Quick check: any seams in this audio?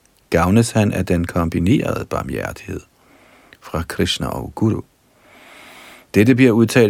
no; 0 cuts

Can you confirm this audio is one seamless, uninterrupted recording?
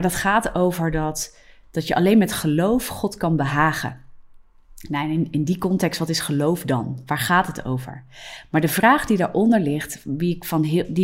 yes; 0 cuts

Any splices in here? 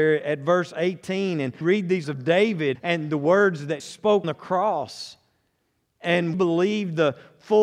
yes; 6 cuts; at 1.6 s, 2.0 s, 2.7 s, 3.8 s, 4.2 s, 6.3 s

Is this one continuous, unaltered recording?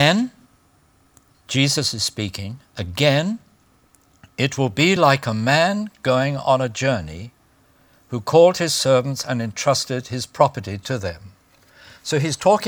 yes; 0 cuts

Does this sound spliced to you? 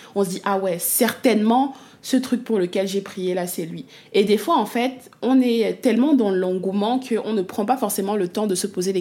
no; 0 cuts

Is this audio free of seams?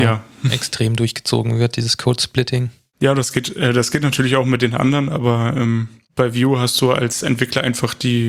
yes; 0 cuts

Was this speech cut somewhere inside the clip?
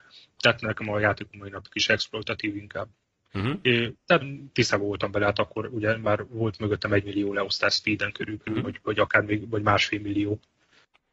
yes; 1 cut; at 4.2 s

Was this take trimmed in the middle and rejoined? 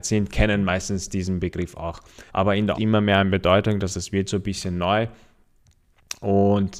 yes; 3 cuts; at 2.3 s, 2.7 s, 3.9 s

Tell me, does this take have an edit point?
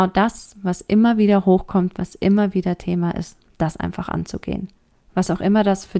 no; 0 cuts

